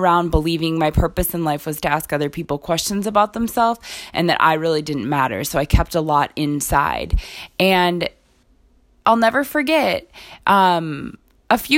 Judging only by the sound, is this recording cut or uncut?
uncut